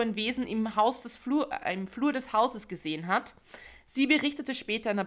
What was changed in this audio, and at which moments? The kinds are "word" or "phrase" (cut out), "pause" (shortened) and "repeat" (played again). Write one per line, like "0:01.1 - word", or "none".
none